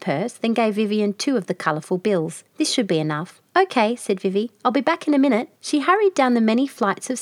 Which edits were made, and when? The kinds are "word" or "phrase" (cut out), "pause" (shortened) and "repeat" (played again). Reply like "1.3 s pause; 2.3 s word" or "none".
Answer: 2.5 s pause; 3.5 s pause; 5.6 s pause